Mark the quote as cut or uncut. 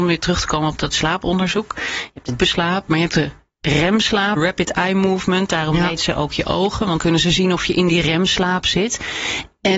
cut